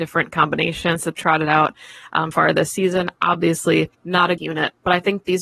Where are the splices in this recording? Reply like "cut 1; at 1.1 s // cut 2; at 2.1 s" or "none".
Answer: cut 1; at 1.2 s // cut 2; at 2.3 s // cut 3; at 3.9 s // cut 4; at 4.4 s